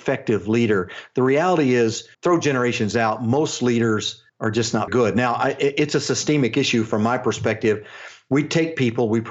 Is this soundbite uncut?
no; 3 cuts; at 2.1 s, 4.3 s, 4.9 s

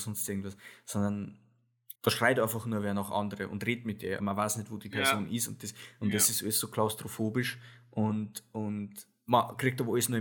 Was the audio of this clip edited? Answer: yes; 2 cuts; at 2.0 s, 4.2 s

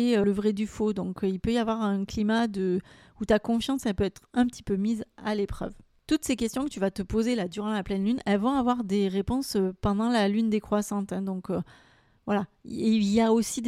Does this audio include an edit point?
no; 0 cuts

